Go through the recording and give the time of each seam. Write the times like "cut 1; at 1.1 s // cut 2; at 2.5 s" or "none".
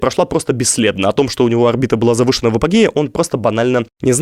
none